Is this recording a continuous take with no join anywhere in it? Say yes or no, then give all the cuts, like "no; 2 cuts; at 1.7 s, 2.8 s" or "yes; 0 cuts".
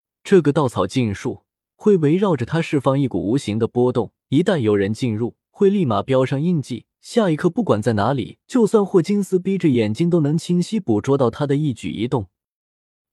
no; 5 cuts; at 1.5 s, 4.2 s, 5.5 s, 6.9 s, 8.4 s